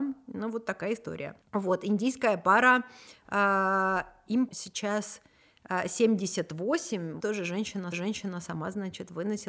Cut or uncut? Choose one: cut